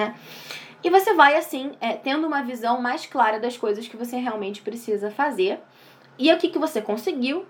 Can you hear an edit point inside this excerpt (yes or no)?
no